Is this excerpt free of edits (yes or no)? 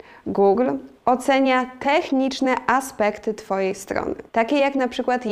no